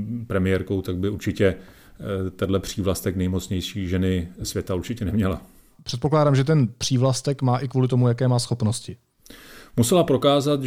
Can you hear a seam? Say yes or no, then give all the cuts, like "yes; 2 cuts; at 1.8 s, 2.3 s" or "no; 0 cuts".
no; 0 cuts